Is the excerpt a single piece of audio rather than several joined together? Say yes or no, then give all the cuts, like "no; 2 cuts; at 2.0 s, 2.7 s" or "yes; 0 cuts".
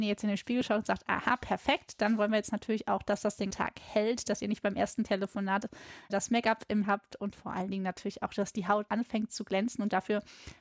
no; 4 cuts; at 3.5 s, 6.1 s, 6.8 s, 8.9 s